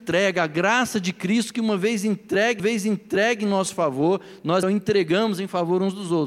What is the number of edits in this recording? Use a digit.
2